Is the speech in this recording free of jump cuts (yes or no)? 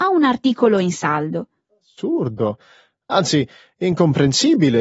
yes